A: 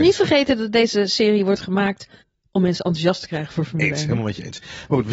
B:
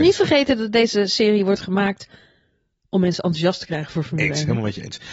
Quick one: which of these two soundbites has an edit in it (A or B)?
A